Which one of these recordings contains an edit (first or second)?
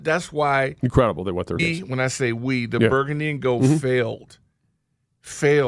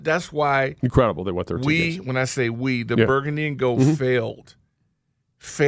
first